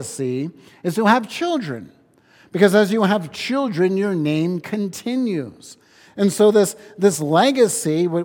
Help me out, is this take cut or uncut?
uncut